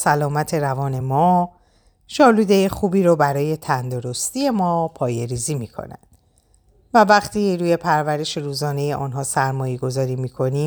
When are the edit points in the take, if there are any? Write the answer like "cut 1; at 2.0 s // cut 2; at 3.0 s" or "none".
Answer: none